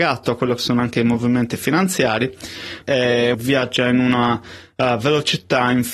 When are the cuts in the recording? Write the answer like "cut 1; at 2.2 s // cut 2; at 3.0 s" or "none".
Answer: cut 1; at 2.8 s // cut 2; at 3.3 s

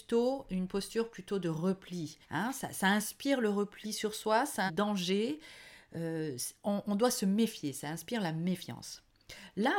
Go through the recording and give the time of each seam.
cut 1; at 2.2 s // cut 2; at 4.7 s

